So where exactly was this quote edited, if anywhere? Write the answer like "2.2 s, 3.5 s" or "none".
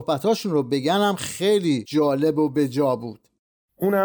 none